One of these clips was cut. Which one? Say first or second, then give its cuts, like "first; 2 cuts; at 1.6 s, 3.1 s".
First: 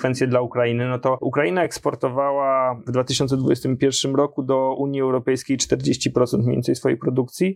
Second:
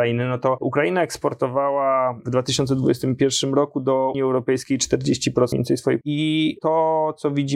second; 3 cuts; at 4.1 s, 5.5 s, 6.0 s